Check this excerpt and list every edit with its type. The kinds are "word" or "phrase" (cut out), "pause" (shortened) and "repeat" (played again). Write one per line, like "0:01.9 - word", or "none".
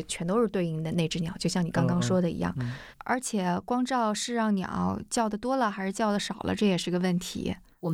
none